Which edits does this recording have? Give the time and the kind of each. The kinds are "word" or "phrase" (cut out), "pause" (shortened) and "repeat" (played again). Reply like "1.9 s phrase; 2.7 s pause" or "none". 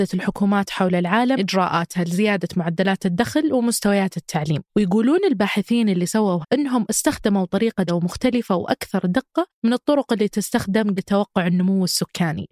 1.4 s word; 4.7 s pause; 6.4 s word; 7.9 s word; 9.5 s pause; 11.0 s word

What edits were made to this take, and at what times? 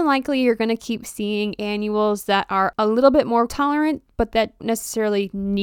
3.5 s word; 4.6 s word

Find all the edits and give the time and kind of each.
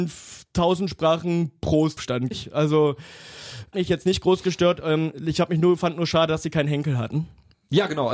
2.0 s word; 2.3 s word; 3.7 s word

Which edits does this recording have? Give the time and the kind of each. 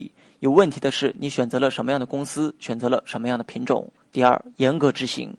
4.0 s pause

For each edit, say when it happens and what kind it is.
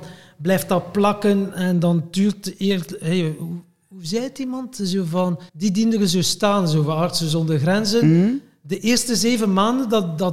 5.5 s pause

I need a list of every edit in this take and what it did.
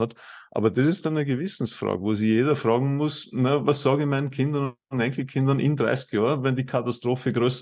none

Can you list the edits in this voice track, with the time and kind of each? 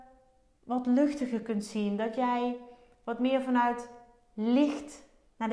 none

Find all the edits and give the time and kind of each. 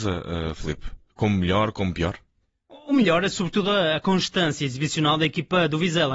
none

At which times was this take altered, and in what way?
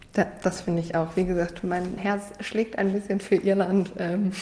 2.0 s word

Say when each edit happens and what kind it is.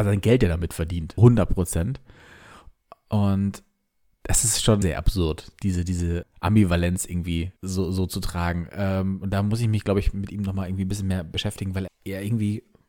1.2 s word; 4.8 s word; 6.2 s word; 7.6 s pause; 11.9 s word

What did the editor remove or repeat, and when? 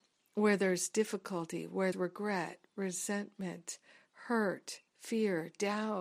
1.9 s word; 4.9 s pause

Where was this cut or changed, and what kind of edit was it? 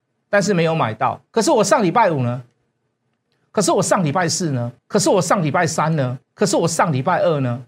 4.8 s pause; 6.2 s pause

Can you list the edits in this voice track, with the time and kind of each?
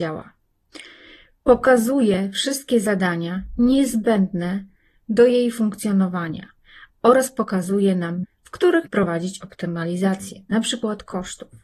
8.2 s word; 8.9 s word

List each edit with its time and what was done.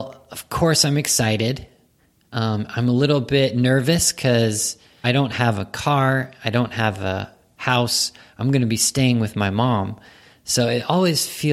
5.0 s phrase

